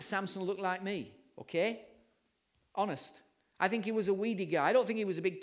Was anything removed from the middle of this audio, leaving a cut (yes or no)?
no